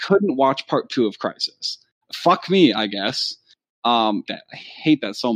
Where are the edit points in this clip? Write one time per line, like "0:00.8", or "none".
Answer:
0:04.3